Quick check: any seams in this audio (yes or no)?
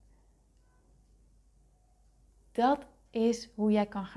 no